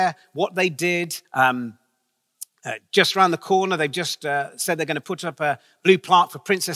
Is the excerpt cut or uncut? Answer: cut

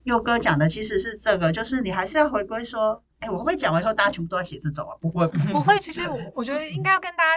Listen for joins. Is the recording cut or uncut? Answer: cut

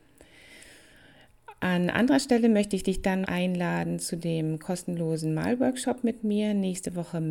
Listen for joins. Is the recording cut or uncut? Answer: cut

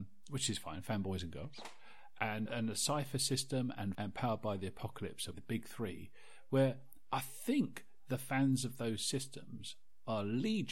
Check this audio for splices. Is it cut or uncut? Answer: cut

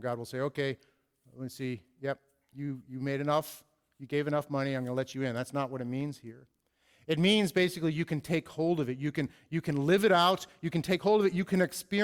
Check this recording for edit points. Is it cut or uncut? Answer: uncut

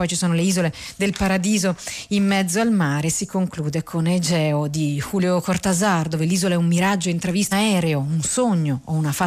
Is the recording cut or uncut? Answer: cut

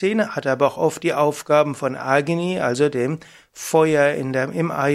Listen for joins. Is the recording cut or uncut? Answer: uncut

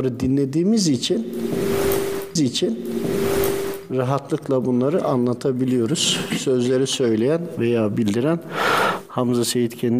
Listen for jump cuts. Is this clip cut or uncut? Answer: cut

